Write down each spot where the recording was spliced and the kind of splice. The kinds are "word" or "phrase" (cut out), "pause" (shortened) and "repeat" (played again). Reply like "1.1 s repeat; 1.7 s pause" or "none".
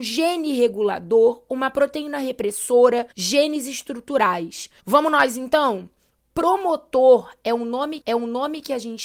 3.1 s pause; 4.8 s pause; 8.0 s repeat